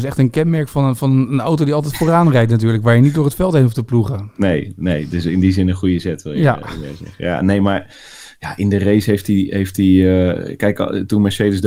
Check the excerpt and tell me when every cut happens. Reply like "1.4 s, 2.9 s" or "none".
none